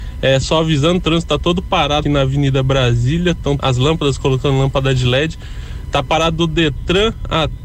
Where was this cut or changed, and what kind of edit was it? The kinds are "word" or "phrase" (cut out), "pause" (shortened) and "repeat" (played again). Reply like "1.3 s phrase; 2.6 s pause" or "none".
2.0 s word; 3.6 s word